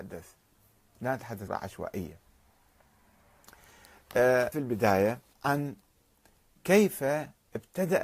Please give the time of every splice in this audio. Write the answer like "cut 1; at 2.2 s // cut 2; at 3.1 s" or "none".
cut 1; at 1.5 s // cut 2; at 4.5 s // cut 3; at 5.3 s